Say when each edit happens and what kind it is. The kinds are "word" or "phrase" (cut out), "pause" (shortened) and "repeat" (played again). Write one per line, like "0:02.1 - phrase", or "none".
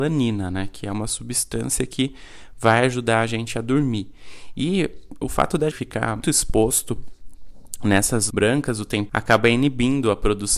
0:05.7 - word
0:06.2 - word
0:08.3 - word
0:09.1 - word